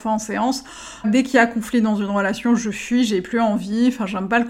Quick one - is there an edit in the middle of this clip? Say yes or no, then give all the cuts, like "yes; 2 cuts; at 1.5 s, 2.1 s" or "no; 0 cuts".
yes; 1 cut; at 1.0 s